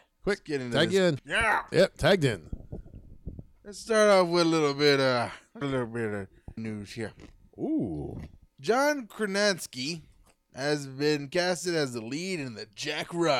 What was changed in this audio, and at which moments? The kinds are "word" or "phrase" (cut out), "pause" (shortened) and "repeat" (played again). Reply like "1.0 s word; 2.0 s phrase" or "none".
1.2 s word; 5.6 s word; 6.6 s word